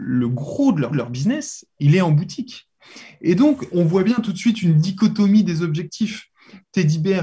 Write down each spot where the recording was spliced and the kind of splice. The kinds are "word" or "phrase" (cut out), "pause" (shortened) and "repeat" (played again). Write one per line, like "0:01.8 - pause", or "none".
0:00.9 - repeat
0:03.7 - word

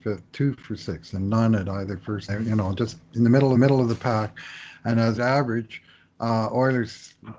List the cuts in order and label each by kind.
0:02.3 - phrase
0:03.6 - repeat
0:05.2 - phrase

